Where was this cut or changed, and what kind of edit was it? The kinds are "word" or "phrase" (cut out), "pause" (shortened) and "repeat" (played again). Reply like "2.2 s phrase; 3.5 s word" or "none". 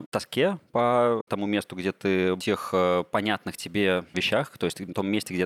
2.4 s phrase